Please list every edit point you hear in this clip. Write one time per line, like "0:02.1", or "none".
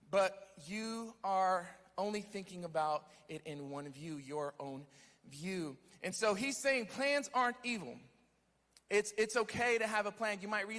none